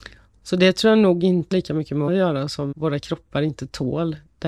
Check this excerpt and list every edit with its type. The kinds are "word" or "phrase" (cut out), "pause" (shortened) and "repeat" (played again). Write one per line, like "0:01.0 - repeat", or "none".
0:01.5 - word
0:02.1 - word
0:02.7 - word